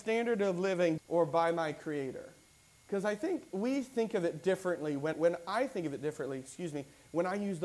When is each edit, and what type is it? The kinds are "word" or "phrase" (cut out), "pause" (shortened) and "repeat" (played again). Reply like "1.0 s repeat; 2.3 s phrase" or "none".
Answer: 1.0 s phrase; 2.5 s pause; 3.5 s word; 5.1 s word